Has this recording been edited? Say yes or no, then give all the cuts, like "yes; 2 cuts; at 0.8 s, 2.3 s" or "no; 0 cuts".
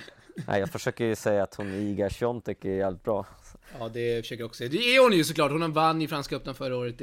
no; 0 cuts